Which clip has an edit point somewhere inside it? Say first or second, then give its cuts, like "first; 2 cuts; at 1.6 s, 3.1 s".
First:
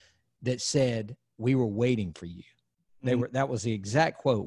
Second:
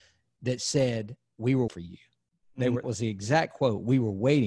second; 2 cuts; at 1.7 s, 2.8 s